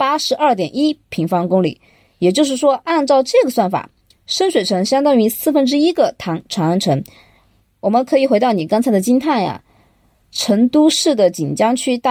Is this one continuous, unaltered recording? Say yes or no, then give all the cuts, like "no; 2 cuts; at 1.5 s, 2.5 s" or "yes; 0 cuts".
yes; 0 cuts